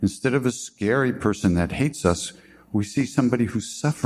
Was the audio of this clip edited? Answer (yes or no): no